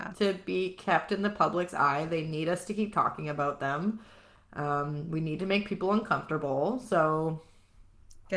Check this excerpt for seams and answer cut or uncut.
uncut